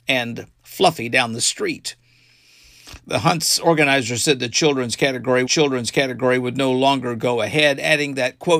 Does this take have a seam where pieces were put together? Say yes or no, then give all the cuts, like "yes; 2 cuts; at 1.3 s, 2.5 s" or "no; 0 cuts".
yes; 1 cut; at 5.5 s